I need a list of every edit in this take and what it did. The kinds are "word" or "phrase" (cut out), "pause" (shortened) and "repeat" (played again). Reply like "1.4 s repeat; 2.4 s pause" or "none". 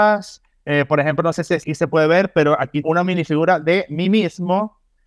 1.6 s word; 2.8 s word